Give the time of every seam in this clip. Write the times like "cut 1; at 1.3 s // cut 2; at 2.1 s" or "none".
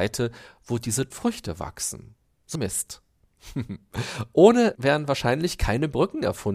cut 1; at 1.1 s // cut 2; at 2.6 s // cut 3; at 4.8 s